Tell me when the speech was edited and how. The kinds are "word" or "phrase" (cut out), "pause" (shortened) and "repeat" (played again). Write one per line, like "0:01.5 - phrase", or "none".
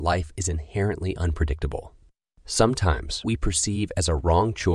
0:03.2 - word